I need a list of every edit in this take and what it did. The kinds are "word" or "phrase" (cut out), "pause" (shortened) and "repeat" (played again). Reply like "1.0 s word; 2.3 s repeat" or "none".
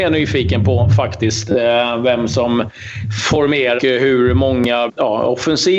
3.8 s word; 4.9 s word